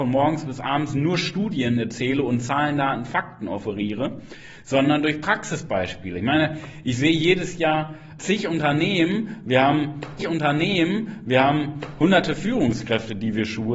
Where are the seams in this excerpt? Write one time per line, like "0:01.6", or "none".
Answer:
0:08.2
0:10.2